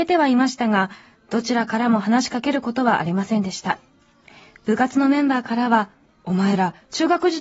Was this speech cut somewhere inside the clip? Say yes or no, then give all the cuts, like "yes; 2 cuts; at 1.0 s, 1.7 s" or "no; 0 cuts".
no; 0 cuts